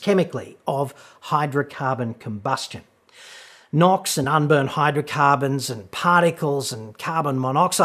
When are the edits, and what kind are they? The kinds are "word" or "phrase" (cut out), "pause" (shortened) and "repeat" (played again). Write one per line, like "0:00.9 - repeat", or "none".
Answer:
none

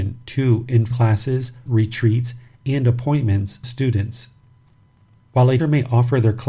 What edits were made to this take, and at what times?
0:00.9 - word
0:01.7 - word
0:03.6 - word
0:05.6 - word

